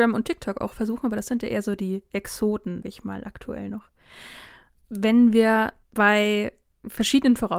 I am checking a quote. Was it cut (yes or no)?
yes